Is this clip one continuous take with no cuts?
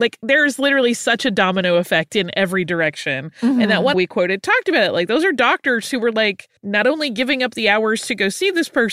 no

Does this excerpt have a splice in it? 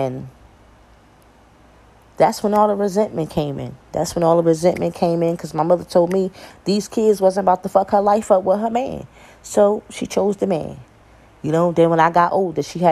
no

